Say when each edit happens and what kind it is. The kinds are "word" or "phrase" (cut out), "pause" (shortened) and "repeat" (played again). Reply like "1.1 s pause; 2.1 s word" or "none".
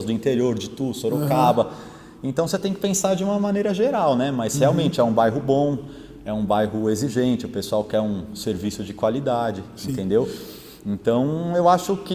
none